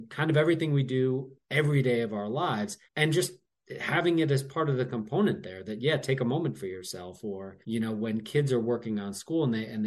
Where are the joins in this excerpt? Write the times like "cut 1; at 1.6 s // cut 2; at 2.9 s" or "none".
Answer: cut 1; at 2.8 s // cut 2; at 7.6 s